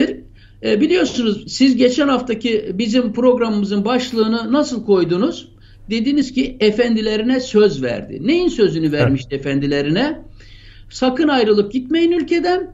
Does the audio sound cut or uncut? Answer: uncut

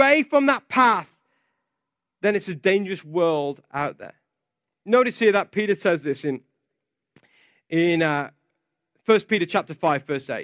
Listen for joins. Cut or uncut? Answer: uncut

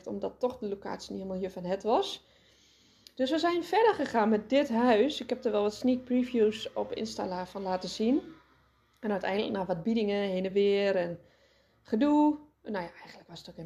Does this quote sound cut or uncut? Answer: uncut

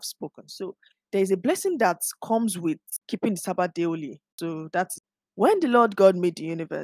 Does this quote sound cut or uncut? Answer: uncut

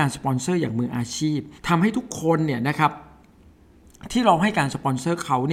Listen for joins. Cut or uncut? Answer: cut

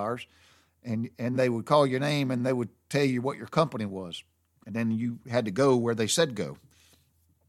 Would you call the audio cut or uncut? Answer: cut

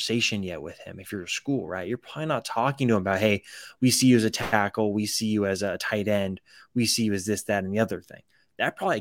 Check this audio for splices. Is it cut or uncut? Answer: uncut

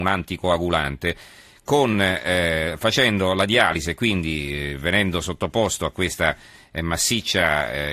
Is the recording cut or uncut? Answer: uncut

